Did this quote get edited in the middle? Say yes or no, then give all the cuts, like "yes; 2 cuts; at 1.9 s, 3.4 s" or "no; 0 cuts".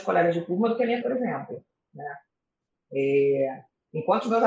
yes; 1 cut; at 1.0 s